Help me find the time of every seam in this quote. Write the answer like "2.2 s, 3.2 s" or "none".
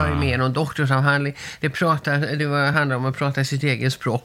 none

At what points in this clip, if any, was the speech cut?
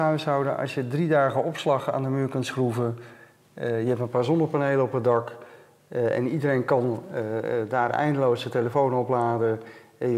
none

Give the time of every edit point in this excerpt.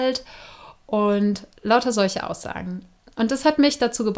none

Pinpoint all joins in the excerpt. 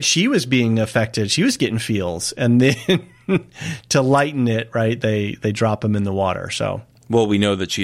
none

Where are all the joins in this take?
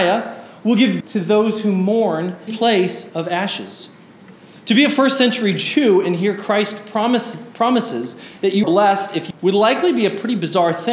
1.0 s, 2.5 s, 8.6 s, 9.3 s

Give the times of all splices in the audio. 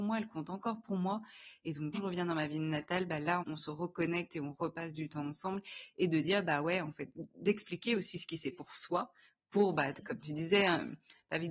1.9 s, 3.4 s, 8.5 s

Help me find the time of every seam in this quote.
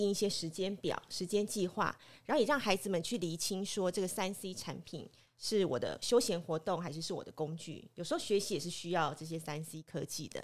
none

